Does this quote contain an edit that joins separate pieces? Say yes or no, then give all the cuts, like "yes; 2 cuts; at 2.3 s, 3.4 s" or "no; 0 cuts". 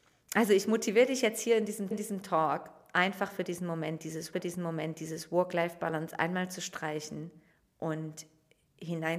yes; 3 cuts; at 1.9 s, 4.3 s, 7.5 s